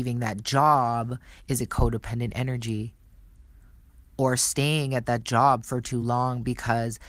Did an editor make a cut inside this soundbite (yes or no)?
no